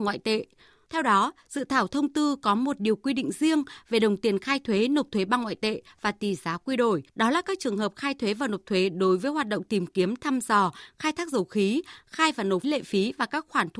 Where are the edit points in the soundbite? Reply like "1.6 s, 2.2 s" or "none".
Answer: 7.1 s, 12.6 s